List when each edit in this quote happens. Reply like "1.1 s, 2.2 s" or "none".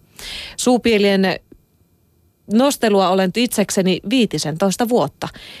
3.3 s